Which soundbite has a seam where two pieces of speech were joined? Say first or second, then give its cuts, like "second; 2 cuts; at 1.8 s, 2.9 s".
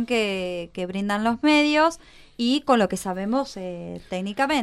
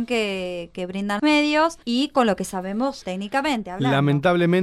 second; 3 cuts; at 1.2 s, 1.8 s, 3.0 s